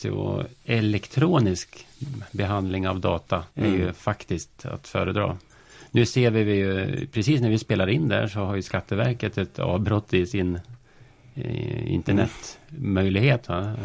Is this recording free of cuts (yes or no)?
no